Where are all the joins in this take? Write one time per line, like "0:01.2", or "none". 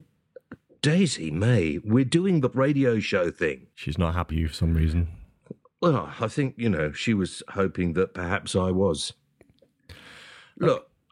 0:02.5
0:03.7
0:04.3